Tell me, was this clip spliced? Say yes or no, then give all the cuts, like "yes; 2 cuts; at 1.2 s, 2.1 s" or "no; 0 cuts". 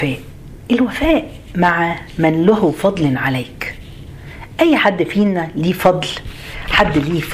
no; 0 cuts